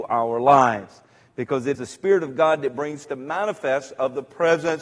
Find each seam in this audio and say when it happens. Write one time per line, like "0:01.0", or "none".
0:01.7
0:03.0